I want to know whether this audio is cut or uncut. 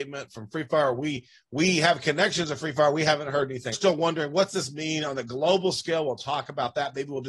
cut